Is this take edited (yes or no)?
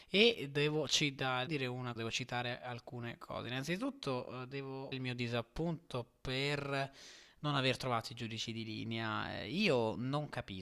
yes